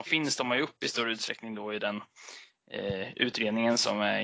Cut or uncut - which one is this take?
uncut